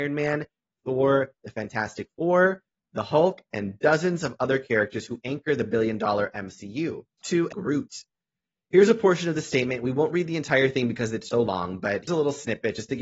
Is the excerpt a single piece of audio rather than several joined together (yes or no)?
no